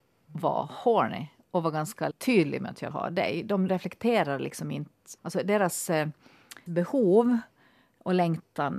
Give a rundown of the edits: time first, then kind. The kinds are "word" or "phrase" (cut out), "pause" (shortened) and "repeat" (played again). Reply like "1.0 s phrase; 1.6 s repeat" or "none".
2.1 s word; 2.9 s word; 3.7 s word; 5.2 s pause; 6.7 s word